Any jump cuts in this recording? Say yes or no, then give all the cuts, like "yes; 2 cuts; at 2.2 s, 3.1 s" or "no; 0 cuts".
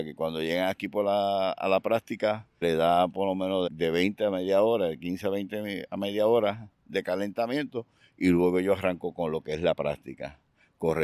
yes; 2 cuts; at 2.6 s, 3.7 s